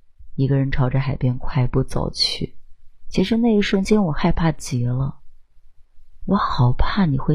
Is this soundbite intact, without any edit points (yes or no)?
no